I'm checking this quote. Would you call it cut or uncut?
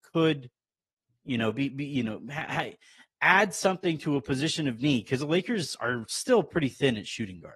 uncut